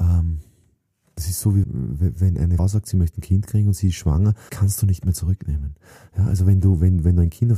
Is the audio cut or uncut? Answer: cut